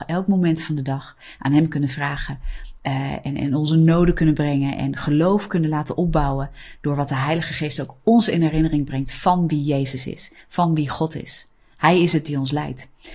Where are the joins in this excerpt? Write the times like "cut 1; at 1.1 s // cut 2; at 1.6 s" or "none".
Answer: none